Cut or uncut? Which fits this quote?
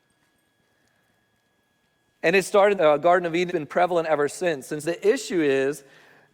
cut